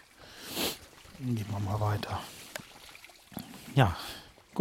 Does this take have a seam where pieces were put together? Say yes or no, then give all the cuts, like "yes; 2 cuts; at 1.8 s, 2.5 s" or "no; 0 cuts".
no; 0 cuts